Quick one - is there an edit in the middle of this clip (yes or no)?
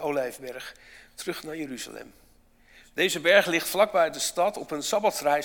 no